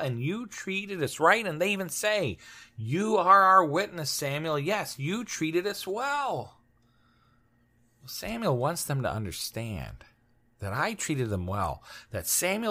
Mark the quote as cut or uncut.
uncut